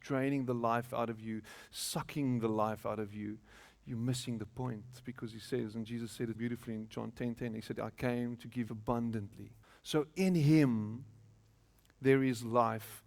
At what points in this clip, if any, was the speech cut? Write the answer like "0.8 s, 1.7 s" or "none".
6.4 s, 8.7 s, 9.6 s